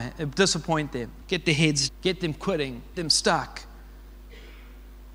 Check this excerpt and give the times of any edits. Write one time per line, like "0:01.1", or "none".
0:01.2
0:01.9
0:02.9

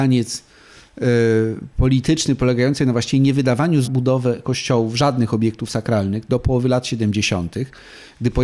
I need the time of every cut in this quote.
0:03.8

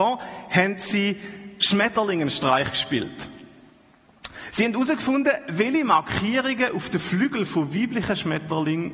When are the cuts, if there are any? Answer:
none

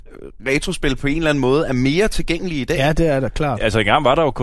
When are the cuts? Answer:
none

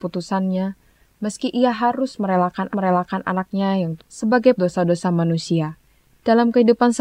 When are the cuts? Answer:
0:02.7
0:04.0
0:04.5
0:05.9

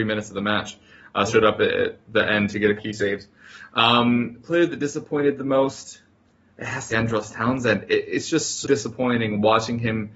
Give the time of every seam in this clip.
0:01.3
0:02.8
0:06.9
0:08.6

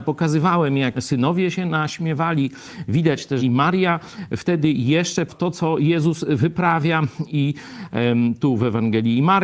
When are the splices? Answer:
0:00.9
0:03.4
0:05.3

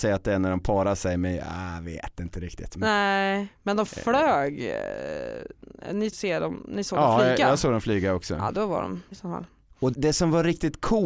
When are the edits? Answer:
0:06.1
0:09.1
0:09.9

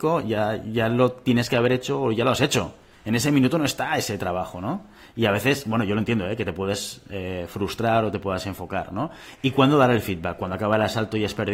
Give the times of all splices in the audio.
none

